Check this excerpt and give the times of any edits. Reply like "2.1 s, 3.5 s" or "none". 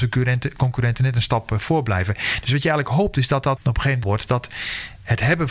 3.6 s, 4.0 s

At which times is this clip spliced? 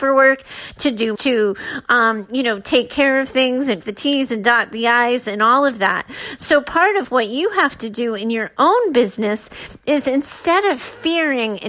1.1 s, 3.8 s

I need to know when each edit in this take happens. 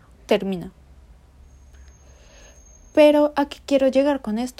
none

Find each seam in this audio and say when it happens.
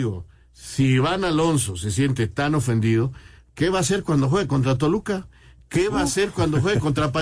none

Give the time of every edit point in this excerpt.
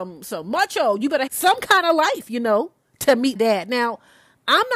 1.3 s, 3.4 s

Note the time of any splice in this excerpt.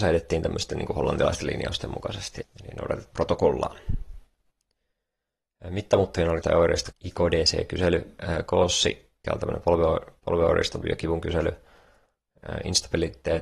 1.4 s, 2.4 s, 3.1 s, 6.4 s, 6.9 s, 9.2 s, 10.8 s

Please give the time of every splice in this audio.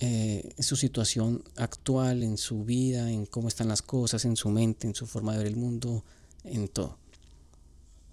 none

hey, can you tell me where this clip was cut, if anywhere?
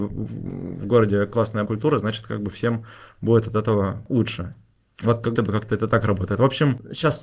1.7 s, 5.4 s

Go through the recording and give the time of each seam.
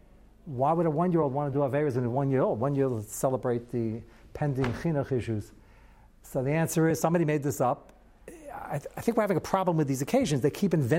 none

